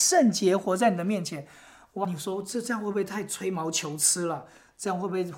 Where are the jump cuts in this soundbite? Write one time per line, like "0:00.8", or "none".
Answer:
none